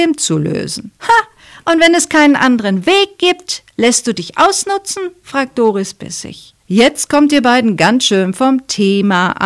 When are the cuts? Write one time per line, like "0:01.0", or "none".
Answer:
0:00.9
0:06.6